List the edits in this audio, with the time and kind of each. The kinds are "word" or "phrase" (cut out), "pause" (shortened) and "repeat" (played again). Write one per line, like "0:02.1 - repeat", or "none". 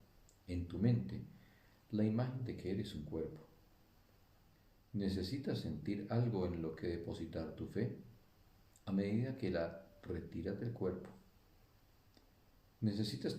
none